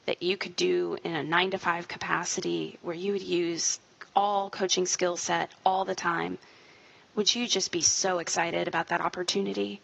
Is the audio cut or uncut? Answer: uncut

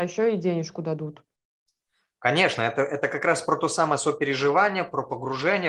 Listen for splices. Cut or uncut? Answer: uncut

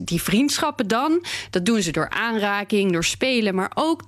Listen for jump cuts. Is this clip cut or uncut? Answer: uncut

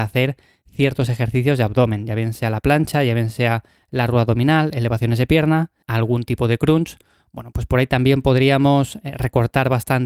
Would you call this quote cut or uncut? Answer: uncut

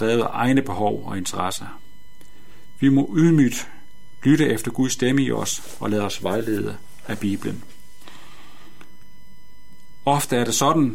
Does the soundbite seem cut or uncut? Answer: uncut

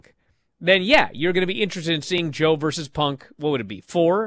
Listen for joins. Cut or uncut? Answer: uncut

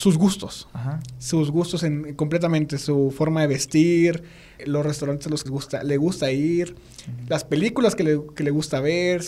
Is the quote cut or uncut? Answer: cut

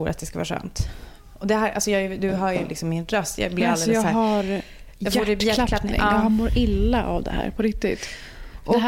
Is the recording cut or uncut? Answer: uncut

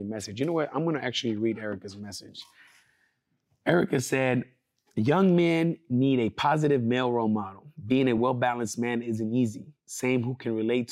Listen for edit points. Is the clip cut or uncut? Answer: uncut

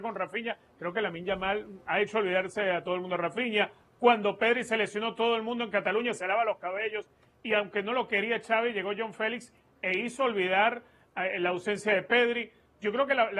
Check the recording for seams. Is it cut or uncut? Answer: uncut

